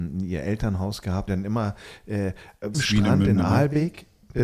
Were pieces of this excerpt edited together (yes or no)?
yes